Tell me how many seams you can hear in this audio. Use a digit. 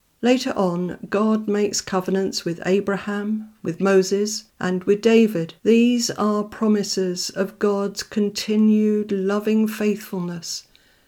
2